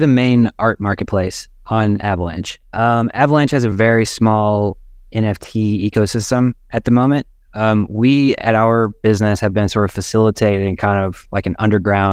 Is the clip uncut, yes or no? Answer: yes